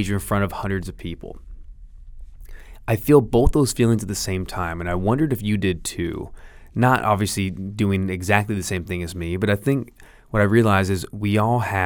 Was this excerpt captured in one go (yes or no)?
yes